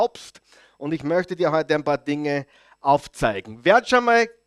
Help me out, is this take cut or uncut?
uncut